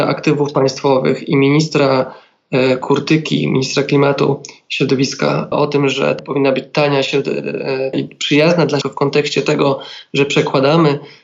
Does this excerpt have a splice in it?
yes; 4 cuts; at 5.5 s, 6.2 s, 7.9 s, 8.8 s

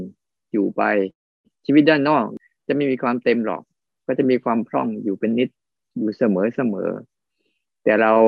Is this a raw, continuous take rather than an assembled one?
yes; 0 cuts

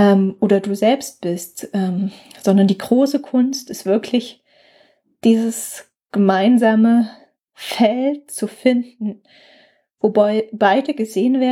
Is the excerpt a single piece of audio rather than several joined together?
yes; 0 cuts

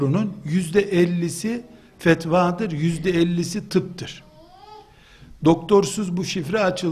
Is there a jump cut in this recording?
no; 0 cuts

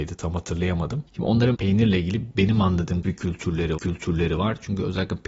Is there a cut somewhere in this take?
yes; 4 cuts; at 1.1 s, 1.5 s, 3.0 s, 3.8 s

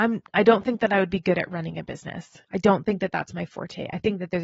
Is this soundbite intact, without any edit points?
no; 1 cut; at 2.4 s

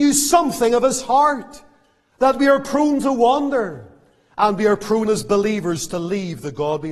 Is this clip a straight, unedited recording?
no; 1 cut; at 5.1 s

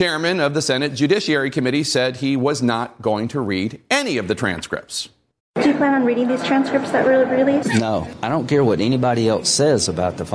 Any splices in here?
yes; 1 cut; at 5.3 s

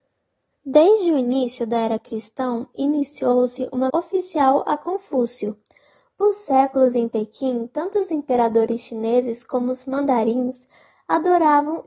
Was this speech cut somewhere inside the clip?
yes; 1 cut; at 3.9 s

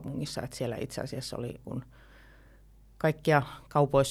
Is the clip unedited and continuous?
no; 1 cut; at 1.6 s

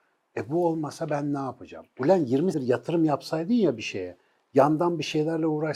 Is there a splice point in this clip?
yes; 1 cut; at 2.5 s

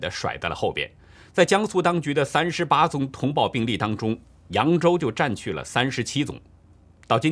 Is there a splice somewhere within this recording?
yes; 1 cut; at 1.0 s

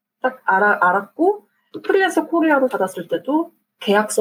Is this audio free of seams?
no; 1 cut; at 2.7 s

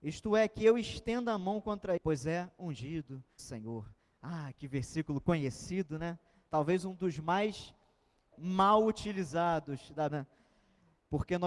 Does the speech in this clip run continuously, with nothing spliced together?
no; 4 cuts; at 2.0 s, 3.4 s, 8.3 s, 10.1 s

